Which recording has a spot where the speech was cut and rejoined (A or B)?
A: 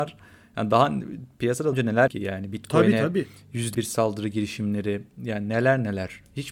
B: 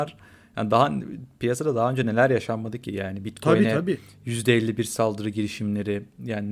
A